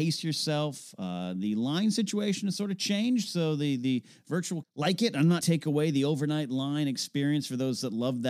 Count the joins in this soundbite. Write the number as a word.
two